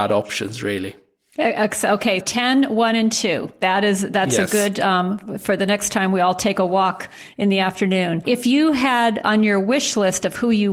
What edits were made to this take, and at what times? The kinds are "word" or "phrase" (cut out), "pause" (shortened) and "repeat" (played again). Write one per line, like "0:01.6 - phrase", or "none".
0:02.2 - word